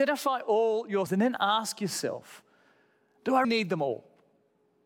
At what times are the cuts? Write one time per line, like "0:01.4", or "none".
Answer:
0:01.1
0:03.4